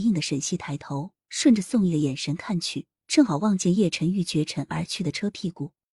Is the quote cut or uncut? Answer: cut